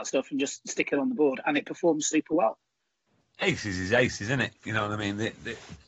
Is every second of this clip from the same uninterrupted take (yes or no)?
yes